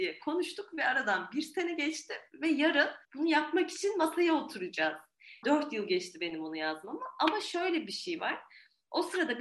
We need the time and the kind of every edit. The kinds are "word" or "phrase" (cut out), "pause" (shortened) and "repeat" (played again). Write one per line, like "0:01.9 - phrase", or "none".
0:03.0 - pause
0:05.4 - word